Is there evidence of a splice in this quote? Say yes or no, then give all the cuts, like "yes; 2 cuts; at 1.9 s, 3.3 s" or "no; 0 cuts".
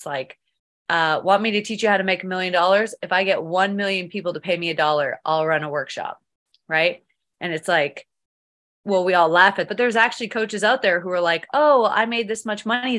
yes; 1 cut; at 9.7 s